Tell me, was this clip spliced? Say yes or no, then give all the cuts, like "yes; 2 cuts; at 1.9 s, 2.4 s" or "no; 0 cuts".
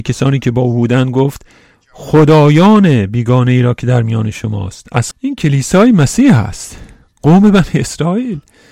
yes; 1 cut; at 5.1 s